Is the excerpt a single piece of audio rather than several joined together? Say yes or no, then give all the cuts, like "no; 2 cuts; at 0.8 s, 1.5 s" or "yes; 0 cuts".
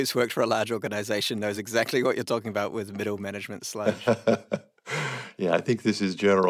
yes; 0 cuts